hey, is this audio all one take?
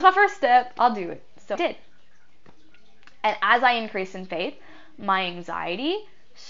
no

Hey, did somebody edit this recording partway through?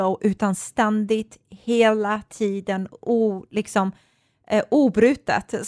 no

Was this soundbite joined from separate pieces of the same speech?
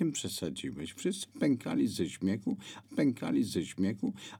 yes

